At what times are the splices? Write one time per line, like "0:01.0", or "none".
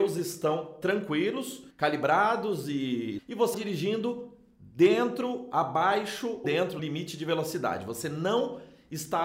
0:01.7
0:03.2
0:03.5
0:06.4
0:06.8

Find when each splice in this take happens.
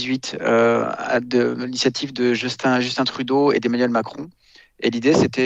none

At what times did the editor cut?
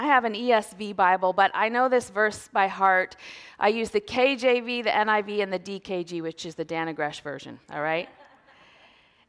0:07.6

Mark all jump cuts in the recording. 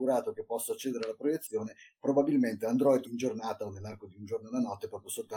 0:03.0

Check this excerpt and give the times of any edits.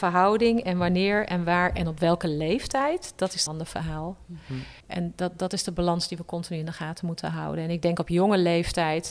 0:03.5
0:04.8

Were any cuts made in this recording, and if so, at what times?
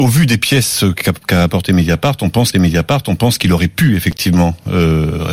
0:02.5

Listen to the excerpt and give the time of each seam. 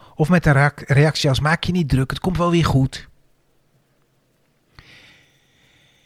none

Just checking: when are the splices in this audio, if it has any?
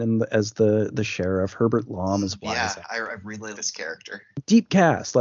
0:03.5

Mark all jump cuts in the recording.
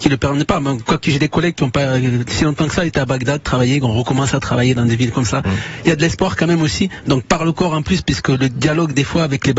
0:02.9

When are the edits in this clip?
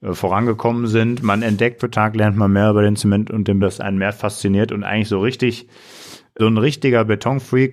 0:01.8
0:03.6
0:06.4

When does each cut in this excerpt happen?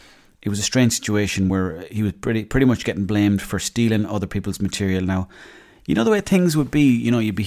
none

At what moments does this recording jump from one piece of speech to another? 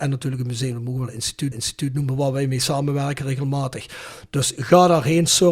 0:01.5

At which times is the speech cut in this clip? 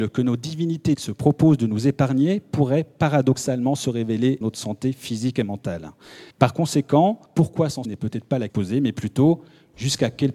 0:00.9
0:04.4
0:06.3
0:07.3
0:07.8
0:08.5

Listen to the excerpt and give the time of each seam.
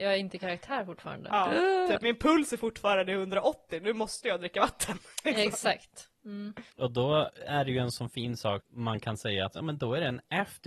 0:06.7
0:08.6

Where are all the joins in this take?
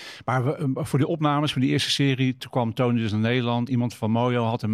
0:02.4
0:03.7

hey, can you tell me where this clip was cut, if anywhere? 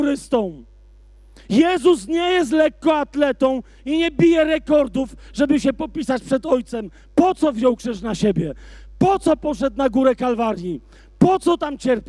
none

